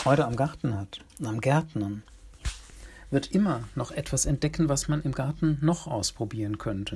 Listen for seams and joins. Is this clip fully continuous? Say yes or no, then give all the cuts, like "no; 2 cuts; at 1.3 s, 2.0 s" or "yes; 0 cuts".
yes; 0 cuts